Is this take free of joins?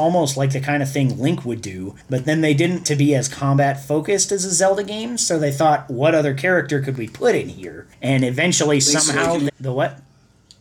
no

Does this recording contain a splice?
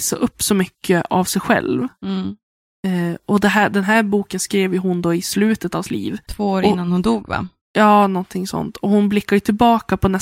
yes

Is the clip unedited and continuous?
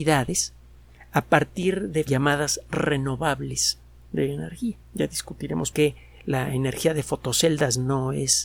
no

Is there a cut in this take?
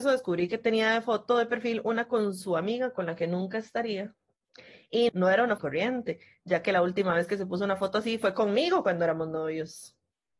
yes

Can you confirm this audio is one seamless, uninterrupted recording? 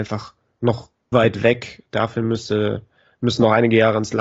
no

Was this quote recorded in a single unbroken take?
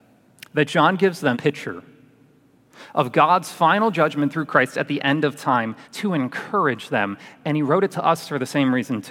no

